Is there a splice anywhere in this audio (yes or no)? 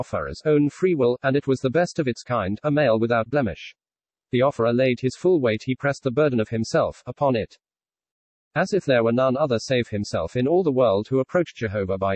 no